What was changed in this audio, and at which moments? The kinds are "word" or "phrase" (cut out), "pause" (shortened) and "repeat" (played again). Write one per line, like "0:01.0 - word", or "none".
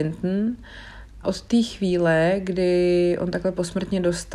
0:01.2 - word